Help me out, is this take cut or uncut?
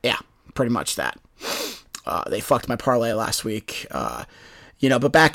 uncut